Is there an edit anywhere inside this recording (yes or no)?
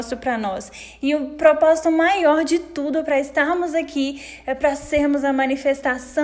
no